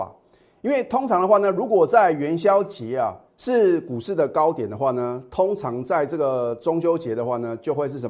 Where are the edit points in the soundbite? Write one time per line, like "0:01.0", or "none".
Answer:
0:03.3